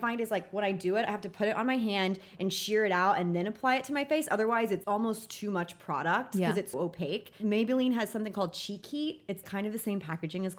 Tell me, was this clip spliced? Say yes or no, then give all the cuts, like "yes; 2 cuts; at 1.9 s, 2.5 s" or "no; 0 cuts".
yes; 3 cuts; at 4.8 s, 6.7 s, 9.4 s